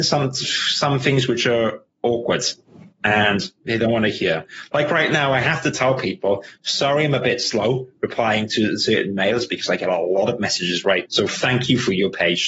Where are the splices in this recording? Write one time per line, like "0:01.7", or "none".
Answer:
0:11.1

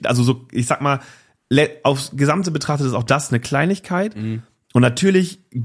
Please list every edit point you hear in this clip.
none

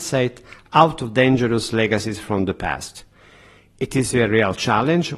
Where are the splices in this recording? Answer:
none

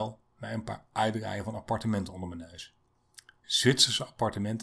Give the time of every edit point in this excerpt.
none

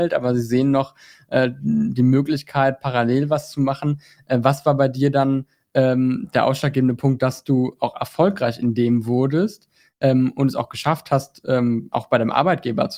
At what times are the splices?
none

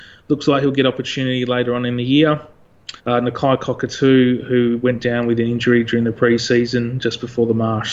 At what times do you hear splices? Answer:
0:03.0

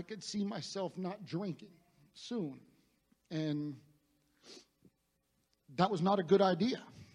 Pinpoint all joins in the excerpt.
none

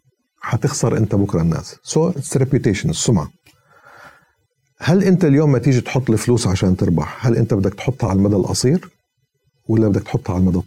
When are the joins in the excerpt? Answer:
none

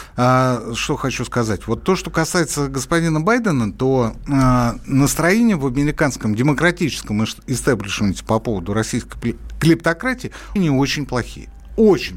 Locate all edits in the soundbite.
0:10.6

